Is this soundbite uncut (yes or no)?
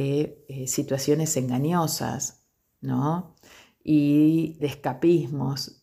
no